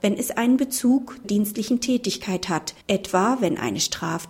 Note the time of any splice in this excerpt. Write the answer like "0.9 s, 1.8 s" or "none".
1.2 s, 2.8 s